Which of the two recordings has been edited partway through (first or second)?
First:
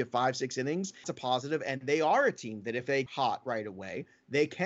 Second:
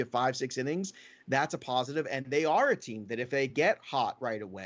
first